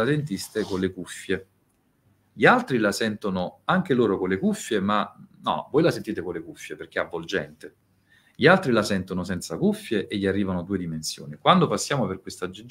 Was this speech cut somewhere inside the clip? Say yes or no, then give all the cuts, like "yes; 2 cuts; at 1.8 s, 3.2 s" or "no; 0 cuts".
no; 0 cuts